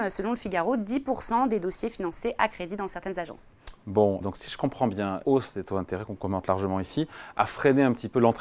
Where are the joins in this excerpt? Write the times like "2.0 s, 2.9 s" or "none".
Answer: 4.2 s, 5.2 s